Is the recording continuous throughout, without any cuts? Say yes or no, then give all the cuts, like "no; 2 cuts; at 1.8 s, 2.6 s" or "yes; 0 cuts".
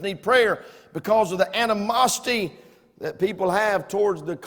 yes; 0 cuts